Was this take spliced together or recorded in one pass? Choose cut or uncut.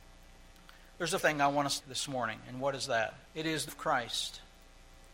cut